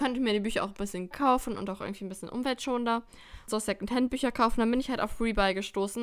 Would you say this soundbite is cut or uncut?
cut